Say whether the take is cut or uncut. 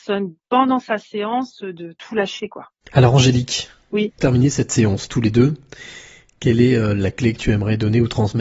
cut